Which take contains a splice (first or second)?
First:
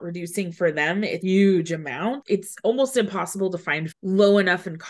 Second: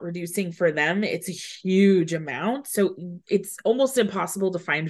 first